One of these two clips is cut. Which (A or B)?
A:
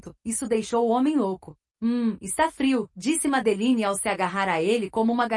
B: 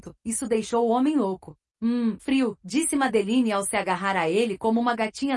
B